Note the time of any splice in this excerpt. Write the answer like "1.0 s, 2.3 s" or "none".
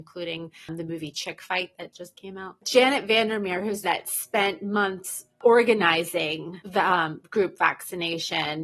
3.8 s